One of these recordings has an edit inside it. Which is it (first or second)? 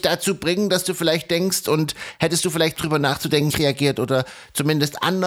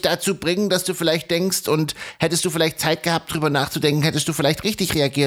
first